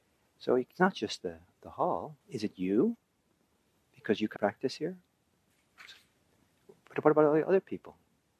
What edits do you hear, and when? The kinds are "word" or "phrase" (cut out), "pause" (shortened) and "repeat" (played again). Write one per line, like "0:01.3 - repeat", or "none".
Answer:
0:02.2 - pause
0:04.4 - word